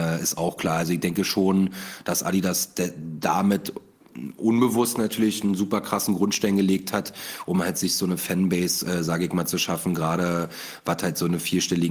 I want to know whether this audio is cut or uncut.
uncut